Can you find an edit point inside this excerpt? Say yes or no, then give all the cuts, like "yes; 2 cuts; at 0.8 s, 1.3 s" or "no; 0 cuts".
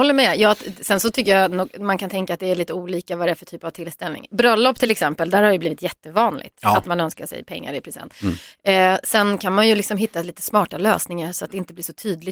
no; 0 cuts